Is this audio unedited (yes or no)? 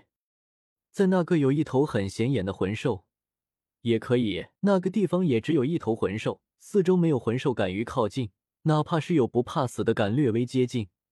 no